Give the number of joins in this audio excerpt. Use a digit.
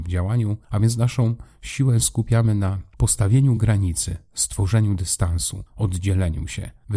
0